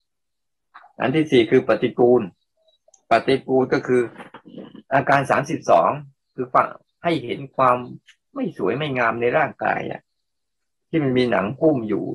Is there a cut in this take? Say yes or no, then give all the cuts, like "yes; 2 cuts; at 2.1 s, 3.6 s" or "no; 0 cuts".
no; 0 cuts